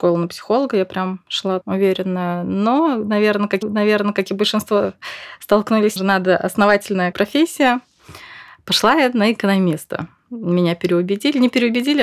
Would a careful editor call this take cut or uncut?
cut